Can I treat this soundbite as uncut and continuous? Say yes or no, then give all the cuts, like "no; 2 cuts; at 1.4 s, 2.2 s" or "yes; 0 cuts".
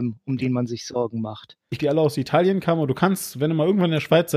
no; 1 cut; at 1.8 s